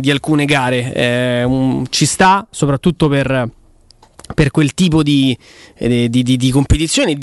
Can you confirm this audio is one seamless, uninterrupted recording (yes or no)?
yes